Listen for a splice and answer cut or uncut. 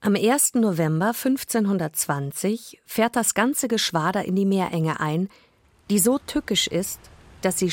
uncut